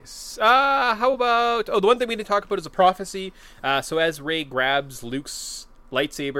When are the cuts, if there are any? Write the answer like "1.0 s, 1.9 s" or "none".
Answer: none

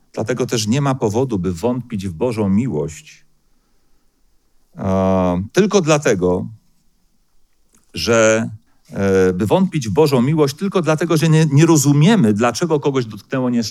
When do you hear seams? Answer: 8.7 s

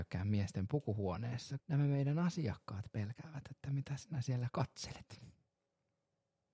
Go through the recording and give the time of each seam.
1.6 s

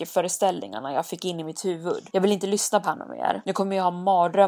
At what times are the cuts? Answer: 2.8 s

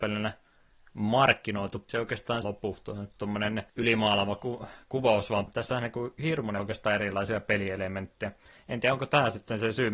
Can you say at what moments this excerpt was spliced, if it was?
1.9 s, 2.4 s, 3.7 s, 5.5 s, 6.6 s

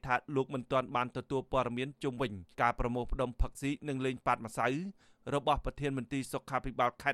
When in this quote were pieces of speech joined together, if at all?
2.5 s

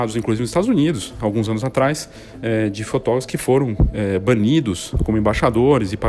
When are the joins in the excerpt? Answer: none

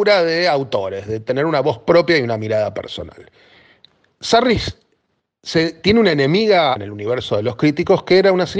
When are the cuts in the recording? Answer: 3.5 s, 6.8 s

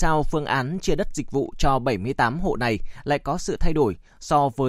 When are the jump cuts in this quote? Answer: none

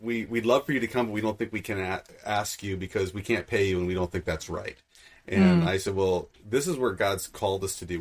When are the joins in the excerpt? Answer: none

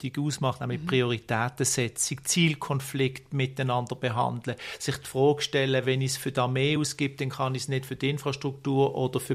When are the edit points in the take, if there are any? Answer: none

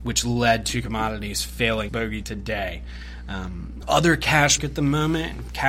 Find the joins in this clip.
1.9 s, 2.2 s, 3.8 s, 4.6 s

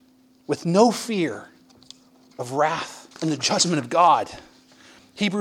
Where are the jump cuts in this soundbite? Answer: 3.1 s

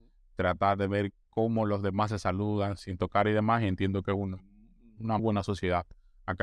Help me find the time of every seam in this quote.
5.2 s

